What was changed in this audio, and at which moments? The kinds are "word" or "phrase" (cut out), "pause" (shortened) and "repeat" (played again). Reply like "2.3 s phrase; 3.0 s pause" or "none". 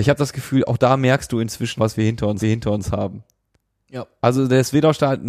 1.8 s word; 2.4 s repeat